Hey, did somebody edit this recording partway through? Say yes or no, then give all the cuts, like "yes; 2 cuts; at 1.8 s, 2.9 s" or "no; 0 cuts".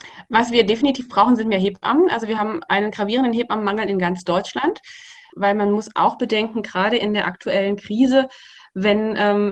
no; 0 cuts